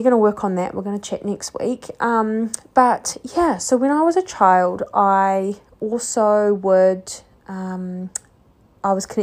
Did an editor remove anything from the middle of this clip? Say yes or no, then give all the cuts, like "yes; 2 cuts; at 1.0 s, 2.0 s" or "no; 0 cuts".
no; 0 cuts